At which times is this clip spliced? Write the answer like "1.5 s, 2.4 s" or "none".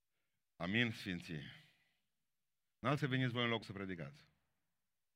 3.0 s, 3.6 s

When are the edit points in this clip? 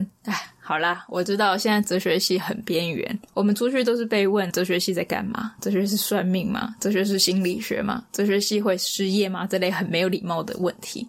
4.5 s

